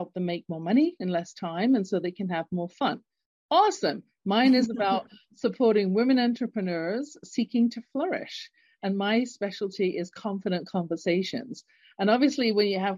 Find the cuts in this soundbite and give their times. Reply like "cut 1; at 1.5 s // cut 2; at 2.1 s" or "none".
none